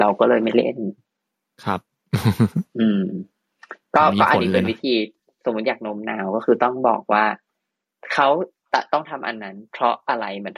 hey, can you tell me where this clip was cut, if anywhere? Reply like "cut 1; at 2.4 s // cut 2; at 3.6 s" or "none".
none